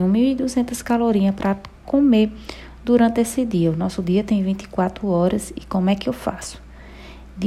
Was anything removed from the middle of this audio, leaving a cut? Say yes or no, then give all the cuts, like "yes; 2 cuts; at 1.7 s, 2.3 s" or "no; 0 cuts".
no; 0 cuts